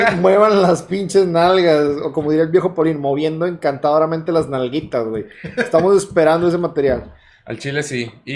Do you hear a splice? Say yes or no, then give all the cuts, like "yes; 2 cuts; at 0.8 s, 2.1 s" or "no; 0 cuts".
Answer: no; 0 cuts